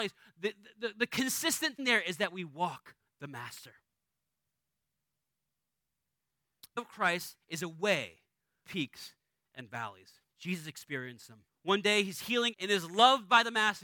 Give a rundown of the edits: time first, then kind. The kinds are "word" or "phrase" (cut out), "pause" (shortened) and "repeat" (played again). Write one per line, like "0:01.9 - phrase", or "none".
0:01.8 - word
0:03.0 - word
0:06.8 - word
0:08.6 - word
0:10.3 - pause
0:11.5 - pause
0:12.5 - word

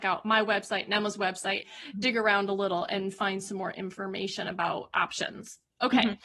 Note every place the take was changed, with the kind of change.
0:01.6 - word

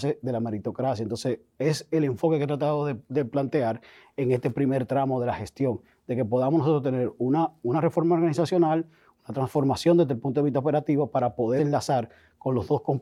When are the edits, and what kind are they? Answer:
0:11.6 - word

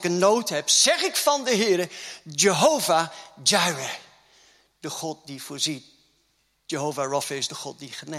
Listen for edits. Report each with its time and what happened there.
none

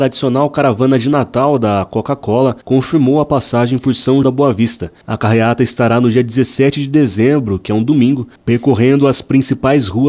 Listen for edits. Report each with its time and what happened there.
0:02.6 - pause
0:04.2 - word

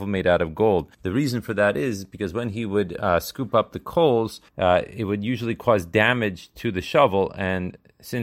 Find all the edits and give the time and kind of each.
0:00.9 - pause
0:04.5 - pause

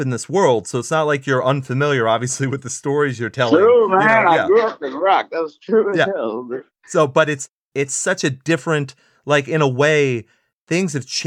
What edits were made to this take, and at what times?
none

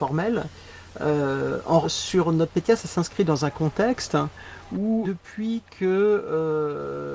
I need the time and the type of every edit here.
0:01.8 - word
0:05.0 - word

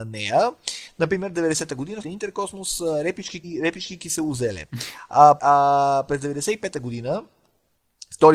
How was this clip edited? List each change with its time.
0:02.0 - phrase
0:03.4 - word
0:05.4 - word

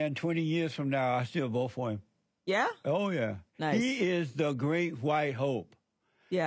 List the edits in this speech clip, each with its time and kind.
0:03.5 - pause

